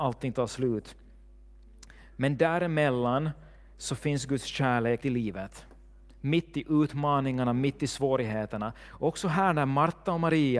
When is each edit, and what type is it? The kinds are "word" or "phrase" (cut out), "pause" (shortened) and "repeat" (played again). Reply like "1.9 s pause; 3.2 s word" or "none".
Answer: 5.0 s word